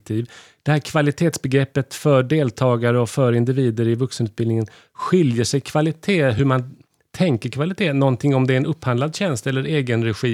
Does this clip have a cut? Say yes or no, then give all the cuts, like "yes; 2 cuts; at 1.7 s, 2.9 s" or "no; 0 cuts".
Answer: no; 0 cuts